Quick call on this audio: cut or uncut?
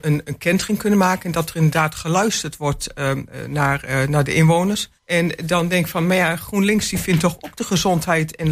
cut